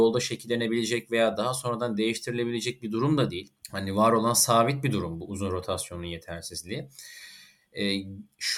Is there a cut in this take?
yes; 1 cut; at 3.6 s

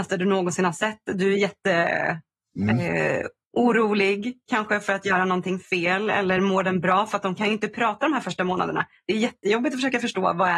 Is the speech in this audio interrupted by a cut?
no; 0 cuts

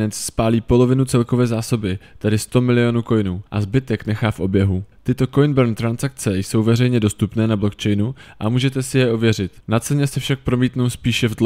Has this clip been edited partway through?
yes; 3 cuts; at 3.5 s, 4.9 s, 9.6 s

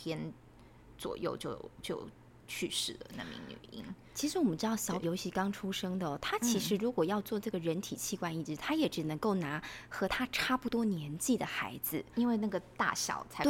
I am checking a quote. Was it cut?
yes; 1 cut; at 5.0 s

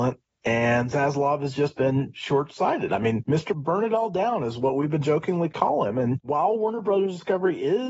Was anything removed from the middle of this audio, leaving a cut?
no; 0 cuts

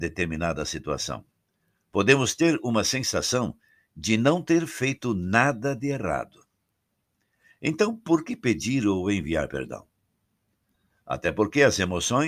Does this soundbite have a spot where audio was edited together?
no; 0 cuts

